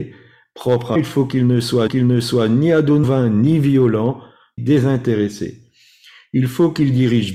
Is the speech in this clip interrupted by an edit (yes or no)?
yes